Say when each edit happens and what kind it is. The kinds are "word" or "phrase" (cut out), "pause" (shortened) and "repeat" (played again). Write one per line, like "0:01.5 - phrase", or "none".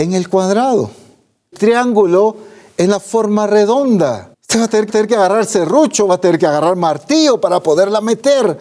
0:01.5 - word
0:04.3 - pause
0:04.9 - repeat